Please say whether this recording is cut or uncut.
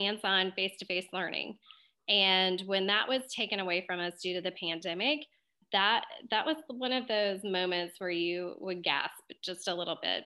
cut